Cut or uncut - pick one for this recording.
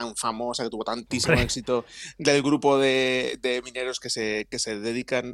uncut